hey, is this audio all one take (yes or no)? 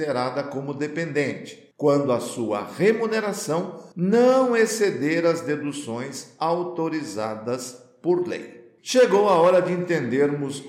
no